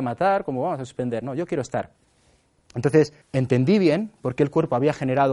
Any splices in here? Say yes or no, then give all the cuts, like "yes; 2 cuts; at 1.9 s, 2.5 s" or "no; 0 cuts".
yes; 1 cut; at 3.2 s